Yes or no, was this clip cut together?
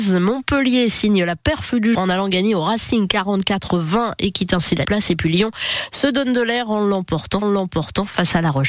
yes